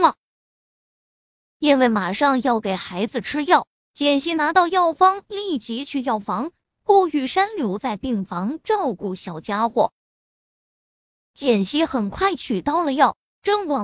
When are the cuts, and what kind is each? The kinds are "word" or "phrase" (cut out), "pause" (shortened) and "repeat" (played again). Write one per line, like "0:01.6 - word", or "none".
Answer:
none